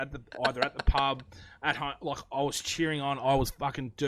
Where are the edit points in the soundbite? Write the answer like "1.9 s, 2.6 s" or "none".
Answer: none

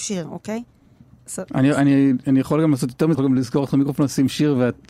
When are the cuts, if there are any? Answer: 3.1 s

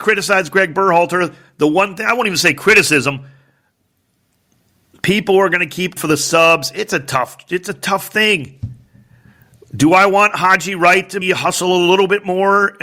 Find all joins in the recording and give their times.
6.0 s, 11.2 s

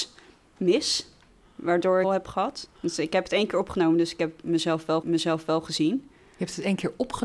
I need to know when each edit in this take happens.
2.0 s, 2.7 s, 5.0 s

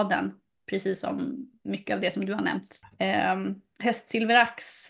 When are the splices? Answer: none

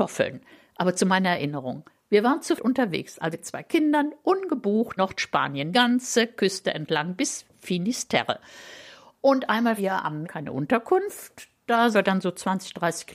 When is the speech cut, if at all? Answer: 1.0 s, 2.6 s, 3.3 s, 5.0 s, 5.7 s, 9.8 s, 10.2 s, 11.9 s

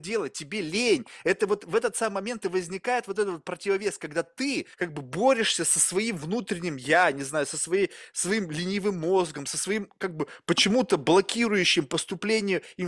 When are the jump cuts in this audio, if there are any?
4.7 s

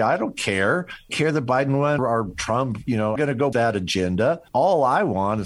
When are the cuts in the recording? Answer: 1.1 s, 2.0 s, 3.2 s, 3.5 s, 4.5 s

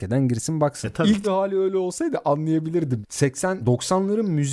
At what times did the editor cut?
1.2 s, 3.6 s

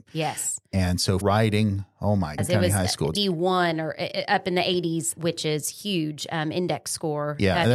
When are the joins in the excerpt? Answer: 1.2 s, 2.4 s, 3.1 s, 5.2 s

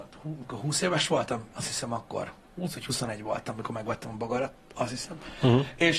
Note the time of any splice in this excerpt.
none

